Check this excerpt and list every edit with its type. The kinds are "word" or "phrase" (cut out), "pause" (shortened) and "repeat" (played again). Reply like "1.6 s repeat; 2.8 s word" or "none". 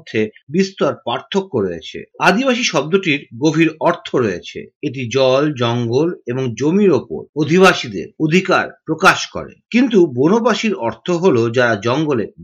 none